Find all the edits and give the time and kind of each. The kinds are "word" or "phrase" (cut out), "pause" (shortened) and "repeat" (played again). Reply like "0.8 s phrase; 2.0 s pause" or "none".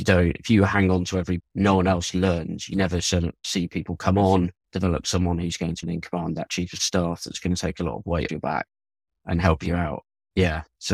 1.4 s phrase; 4.6 s pause; 5.8 s phrase; 8.3 s word